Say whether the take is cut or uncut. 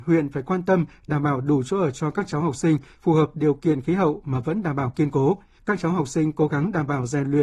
cut